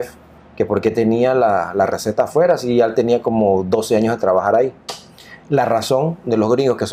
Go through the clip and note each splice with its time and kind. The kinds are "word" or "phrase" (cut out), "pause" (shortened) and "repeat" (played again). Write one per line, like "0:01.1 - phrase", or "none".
none

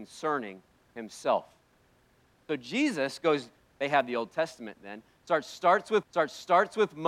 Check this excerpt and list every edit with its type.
0:06.0 - repeat

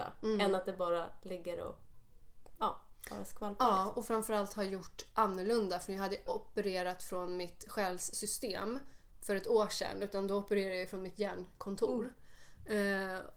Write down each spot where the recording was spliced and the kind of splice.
0:06.3 - word

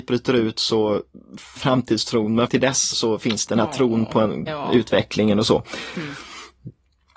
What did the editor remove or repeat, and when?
0:01.6 - word
0:02.5 - word
0:02.9 - word
0:03.5 - word
0:04.5 - word

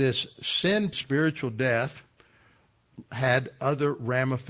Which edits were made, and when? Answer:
0:00.9 - word

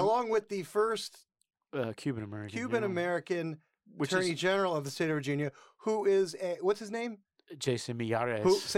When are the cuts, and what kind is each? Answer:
none

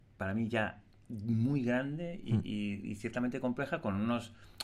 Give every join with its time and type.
none

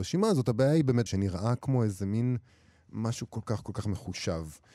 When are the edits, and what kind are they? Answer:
0:01.1 - phrase
0:02.5 - pause

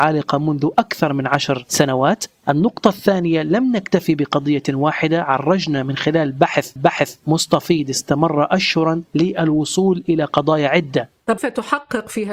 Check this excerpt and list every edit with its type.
0:06.8 - repeat
0:11.4 - word

